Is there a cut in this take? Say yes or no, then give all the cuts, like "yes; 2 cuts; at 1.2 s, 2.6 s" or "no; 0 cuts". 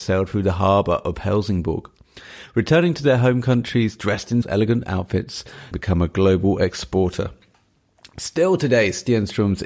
yes; 2 cuts; at 4.4 s, 5.7 s